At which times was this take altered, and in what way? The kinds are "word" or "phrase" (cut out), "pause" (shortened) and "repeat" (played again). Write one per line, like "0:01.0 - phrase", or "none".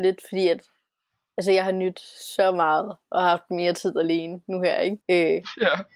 0:05.0 - pause